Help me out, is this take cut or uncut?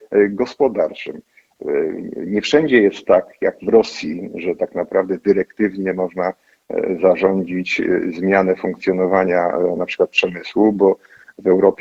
uncut